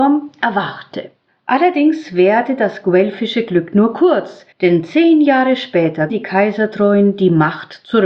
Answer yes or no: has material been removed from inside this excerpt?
yes